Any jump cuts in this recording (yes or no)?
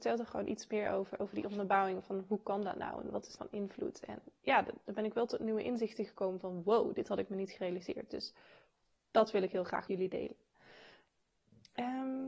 yes